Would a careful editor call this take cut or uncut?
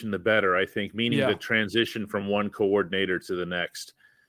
uncut